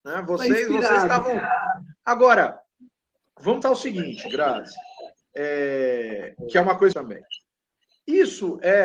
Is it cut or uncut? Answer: cut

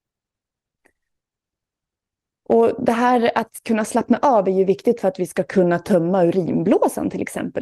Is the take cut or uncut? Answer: uncut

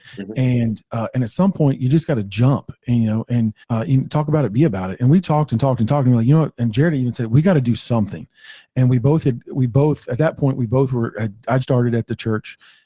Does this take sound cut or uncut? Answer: cut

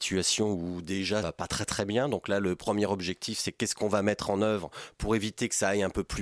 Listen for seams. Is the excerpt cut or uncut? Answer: cut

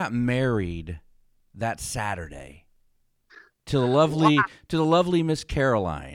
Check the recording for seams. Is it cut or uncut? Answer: uncut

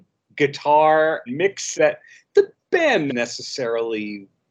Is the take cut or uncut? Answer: cut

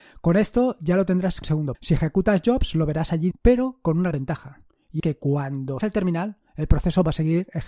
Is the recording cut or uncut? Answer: cut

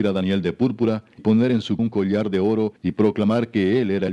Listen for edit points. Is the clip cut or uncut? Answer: cut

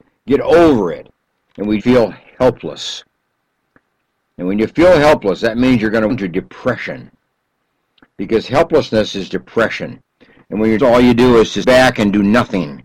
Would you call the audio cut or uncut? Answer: cut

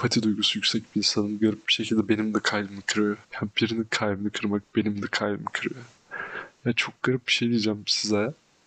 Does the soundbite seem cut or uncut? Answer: cut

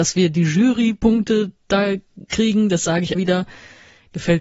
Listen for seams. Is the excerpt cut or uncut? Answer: cut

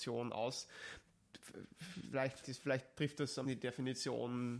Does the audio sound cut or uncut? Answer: cut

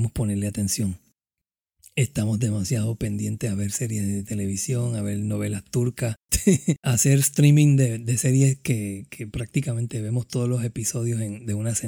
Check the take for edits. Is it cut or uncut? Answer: uncut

